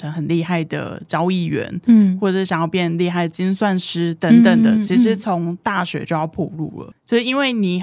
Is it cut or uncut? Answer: uncut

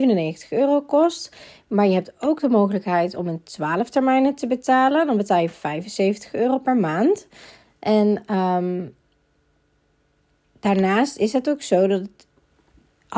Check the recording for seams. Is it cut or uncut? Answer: uncut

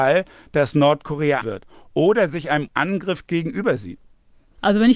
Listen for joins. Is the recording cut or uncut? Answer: cut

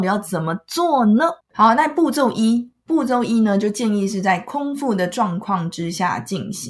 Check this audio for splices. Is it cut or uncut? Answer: cut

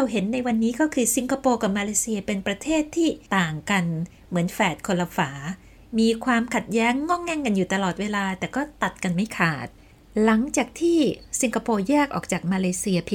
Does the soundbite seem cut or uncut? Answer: cut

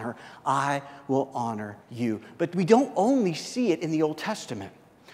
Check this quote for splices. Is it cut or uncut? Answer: cut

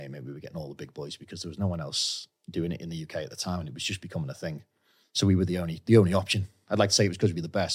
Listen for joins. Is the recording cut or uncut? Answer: cut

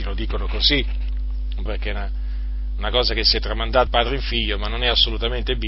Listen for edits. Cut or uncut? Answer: cut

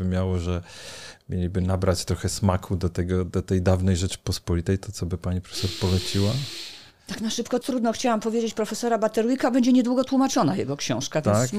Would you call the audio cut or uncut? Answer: cut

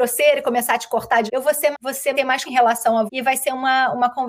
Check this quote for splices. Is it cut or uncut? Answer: cut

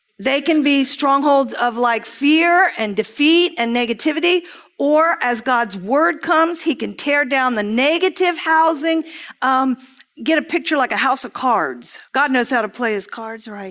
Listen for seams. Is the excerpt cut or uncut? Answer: cut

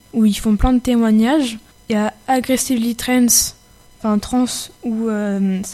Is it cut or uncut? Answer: uncut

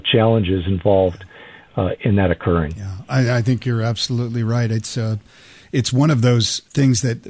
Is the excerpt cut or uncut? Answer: uncut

